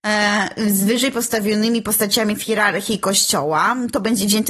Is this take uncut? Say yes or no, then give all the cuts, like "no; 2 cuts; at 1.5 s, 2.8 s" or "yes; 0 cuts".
yes; 0 cuts